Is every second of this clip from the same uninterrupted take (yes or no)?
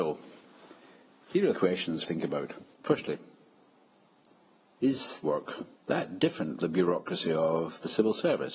no